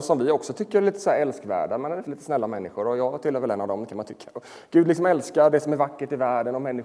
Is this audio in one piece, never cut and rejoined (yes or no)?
no